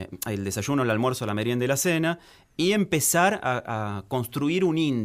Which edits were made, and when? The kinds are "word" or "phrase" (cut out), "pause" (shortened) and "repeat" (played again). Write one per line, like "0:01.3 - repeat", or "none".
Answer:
none